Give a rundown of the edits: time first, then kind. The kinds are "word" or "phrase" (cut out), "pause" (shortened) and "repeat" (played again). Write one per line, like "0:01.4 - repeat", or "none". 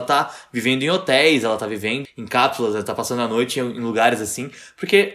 0:02.0 - word